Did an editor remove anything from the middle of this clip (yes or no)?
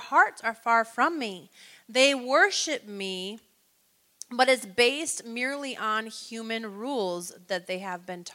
no